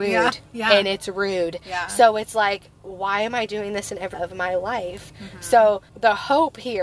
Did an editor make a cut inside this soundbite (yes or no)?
yes